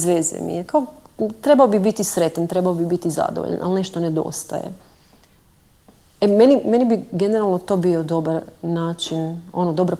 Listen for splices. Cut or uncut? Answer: uncut